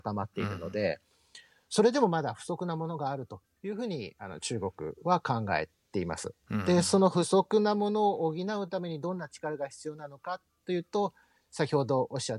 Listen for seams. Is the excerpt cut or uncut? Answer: uncut